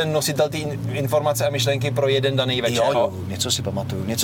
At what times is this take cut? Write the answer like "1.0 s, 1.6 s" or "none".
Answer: 2.9 s